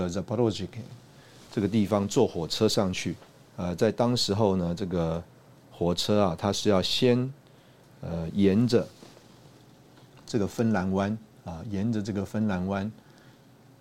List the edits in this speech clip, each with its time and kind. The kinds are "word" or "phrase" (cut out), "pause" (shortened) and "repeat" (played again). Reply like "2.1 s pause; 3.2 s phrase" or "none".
none

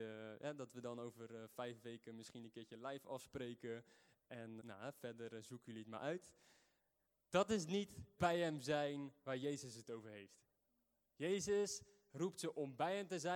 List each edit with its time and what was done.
4.6 s word; 8.2 s word

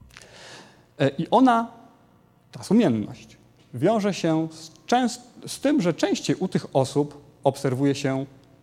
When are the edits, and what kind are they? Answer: none

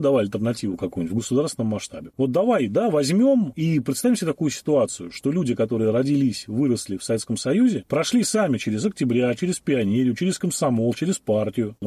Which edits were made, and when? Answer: none

